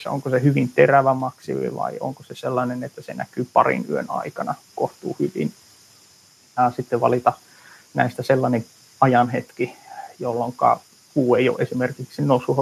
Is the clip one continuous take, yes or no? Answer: yes